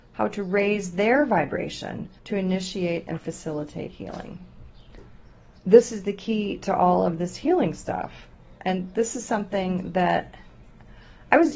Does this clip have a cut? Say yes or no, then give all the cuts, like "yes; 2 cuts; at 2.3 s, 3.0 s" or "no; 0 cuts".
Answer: yes; 3 cuts; at 2.2 s, 5.6 s, 8.6 s